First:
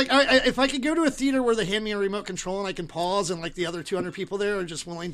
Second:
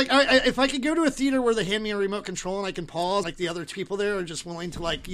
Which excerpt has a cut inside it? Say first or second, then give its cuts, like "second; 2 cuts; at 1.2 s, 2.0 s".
second; 2 cuts; at 3.2 s, 3.7 s